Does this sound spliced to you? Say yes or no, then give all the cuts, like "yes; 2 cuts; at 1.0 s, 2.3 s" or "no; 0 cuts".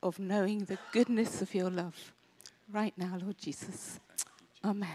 no; 0 cuts